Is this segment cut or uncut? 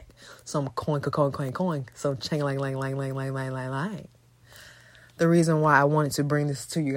uncut